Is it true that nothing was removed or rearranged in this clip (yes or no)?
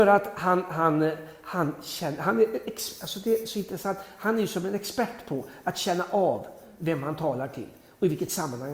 yes